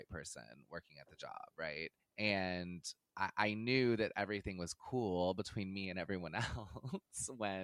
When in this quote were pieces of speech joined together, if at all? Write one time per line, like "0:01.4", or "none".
0:02.0